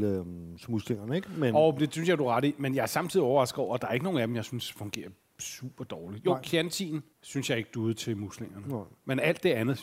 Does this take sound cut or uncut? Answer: cut